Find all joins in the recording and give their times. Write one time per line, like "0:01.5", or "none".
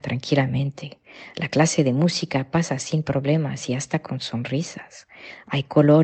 none